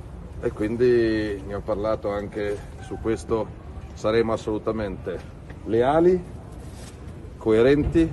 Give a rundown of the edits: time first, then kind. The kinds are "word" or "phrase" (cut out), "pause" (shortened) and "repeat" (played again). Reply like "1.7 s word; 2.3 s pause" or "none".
2.8 s phrase